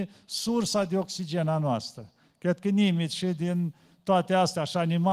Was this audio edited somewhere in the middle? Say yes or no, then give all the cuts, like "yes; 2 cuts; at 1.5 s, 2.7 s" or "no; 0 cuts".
no; 0 cuts